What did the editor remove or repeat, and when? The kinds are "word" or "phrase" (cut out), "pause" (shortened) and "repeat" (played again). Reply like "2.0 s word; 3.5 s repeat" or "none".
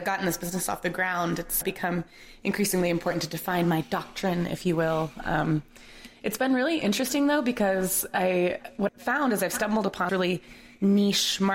1.6 s word; 8.9 s word; 10.1 s word